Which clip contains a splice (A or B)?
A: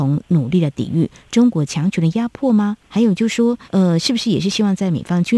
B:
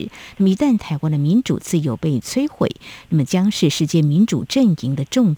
A